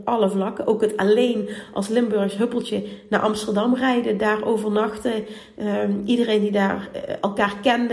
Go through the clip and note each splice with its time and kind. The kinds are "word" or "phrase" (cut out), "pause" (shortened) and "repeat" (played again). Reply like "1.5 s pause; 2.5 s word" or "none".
none